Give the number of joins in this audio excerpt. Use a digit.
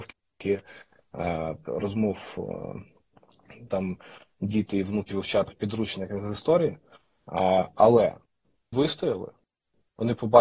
5